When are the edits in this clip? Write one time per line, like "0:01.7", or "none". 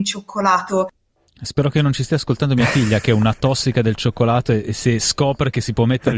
none